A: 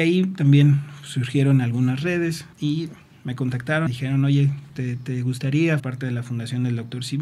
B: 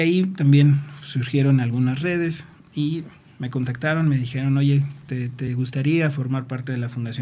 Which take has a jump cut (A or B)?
A